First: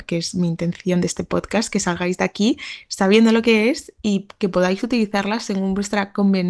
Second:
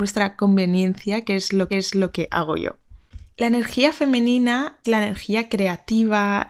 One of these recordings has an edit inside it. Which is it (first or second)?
second